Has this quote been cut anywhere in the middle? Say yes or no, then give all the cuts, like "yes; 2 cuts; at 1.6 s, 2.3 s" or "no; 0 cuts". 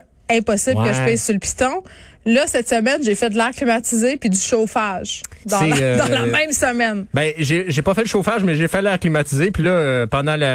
no; 0 cuts